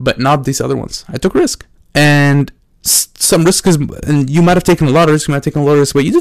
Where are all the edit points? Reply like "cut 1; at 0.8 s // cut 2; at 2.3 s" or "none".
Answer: cut 1; at 1.8 s